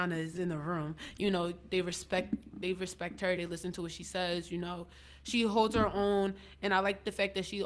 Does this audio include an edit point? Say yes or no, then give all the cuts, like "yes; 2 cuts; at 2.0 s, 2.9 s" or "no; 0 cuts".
no; 0 cuts